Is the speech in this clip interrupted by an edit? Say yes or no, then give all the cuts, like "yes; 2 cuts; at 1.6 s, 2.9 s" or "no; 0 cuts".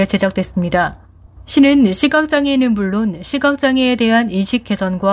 no; 0 cuts